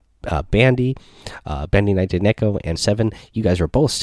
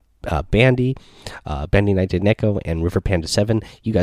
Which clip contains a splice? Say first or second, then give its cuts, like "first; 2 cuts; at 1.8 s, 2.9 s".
first; 1 cut; at 2.8 s